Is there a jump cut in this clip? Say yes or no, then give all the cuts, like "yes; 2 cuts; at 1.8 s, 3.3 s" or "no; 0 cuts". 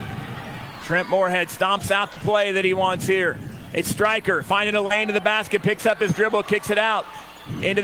no; 0 cuts